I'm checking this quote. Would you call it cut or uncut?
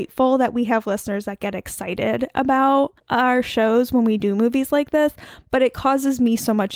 cut